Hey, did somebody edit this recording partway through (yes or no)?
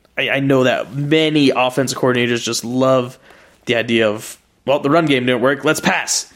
no